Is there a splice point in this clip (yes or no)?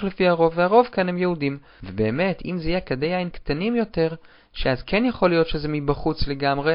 no